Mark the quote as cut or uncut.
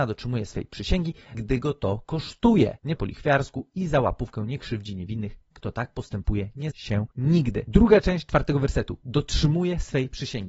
cut